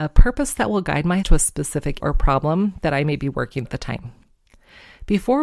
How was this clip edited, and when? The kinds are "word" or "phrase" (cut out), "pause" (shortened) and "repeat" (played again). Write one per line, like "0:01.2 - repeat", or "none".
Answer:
0:01.2 - word
0:02.0 - word
0:03.7 - word

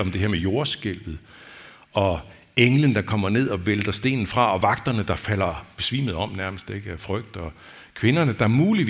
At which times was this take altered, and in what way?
none

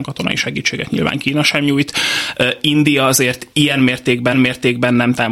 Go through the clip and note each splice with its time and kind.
0:03.5 - pause
0:04.3 - repeat

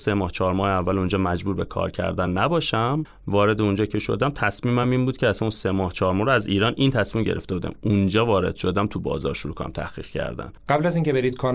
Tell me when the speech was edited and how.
none

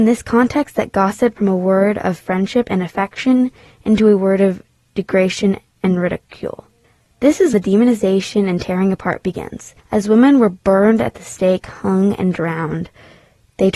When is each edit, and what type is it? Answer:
0:01.4 - word
0:07.5 - word
0:09.8 - pause

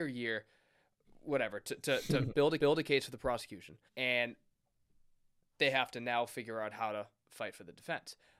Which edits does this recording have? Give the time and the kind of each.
0:02.6 - repeat
0:03.9 - pause

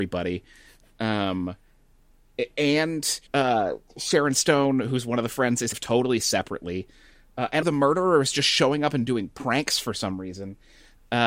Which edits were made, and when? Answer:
0:03.3 - pause
0:05.7 - phrase
0:07.6 - word

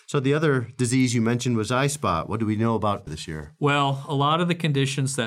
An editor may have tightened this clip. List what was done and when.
0:03.1 - phrase

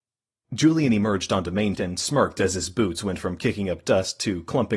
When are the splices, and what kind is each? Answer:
0:01.7 - word

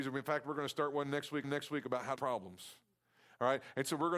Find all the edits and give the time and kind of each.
0:01.4 - repeat
0:02.2 - phrase

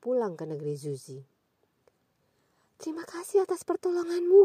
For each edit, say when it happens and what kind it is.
none

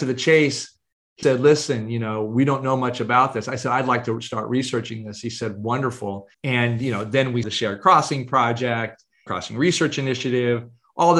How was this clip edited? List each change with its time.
0:01.2 - word
0:06.3 - pause
0:07.4 - word
0:09.3 - phrase

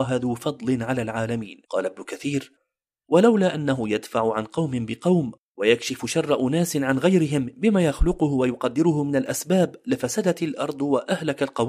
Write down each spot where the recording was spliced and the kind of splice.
0:01.6 - pause

